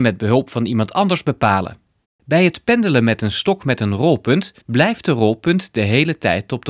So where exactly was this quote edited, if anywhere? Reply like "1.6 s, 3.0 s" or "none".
2.0 s, 4.6 s